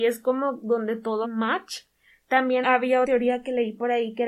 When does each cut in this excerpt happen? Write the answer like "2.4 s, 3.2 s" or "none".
1.2 s, 2.6 s, 3.0 s